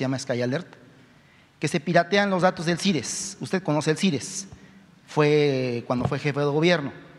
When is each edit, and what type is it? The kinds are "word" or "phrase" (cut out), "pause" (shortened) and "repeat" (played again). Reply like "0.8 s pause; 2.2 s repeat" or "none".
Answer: none